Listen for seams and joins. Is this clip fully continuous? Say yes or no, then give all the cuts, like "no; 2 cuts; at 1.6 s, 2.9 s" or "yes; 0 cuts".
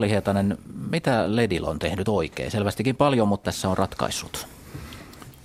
no; 1 cut; at 3.4 s